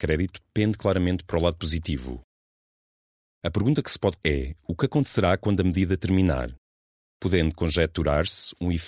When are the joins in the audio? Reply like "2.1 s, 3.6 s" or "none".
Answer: 4.2 s